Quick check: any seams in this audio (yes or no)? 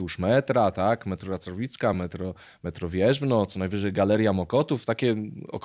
no